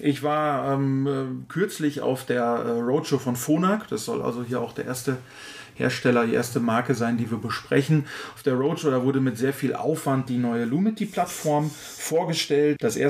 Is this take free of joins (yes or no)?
yes